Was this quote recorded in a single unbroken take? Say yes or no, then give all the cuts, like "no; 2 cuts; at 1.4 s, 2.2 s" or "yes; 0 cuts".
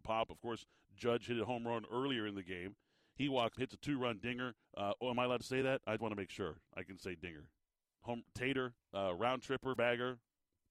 no; 5 cuts; at 3.5 s, 4.6 s, 6.0 s, 8.8 s, 9.8 s